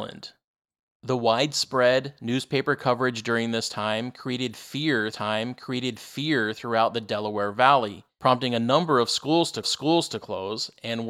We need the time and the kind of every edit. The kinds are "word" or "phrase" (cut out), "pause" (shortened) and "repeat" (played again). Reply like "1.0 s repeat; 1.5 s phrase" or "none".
5.1 s repeat; 9.6 s repeat